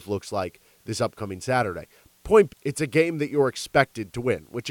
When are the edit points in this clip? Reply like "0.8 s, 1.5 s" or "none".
2.5 s